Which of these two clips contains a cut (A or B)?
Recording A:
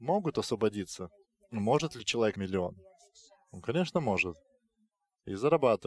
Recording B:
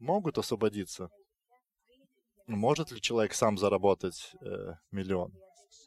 A